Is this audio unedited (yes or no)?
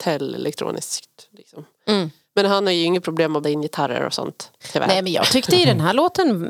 no